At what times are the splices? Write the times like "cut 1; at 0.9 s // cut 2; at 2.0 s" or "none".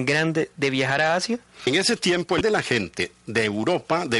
cut 1; at 2.4 s